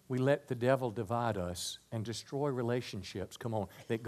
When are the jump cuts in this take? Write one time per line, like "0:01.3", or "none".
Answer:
none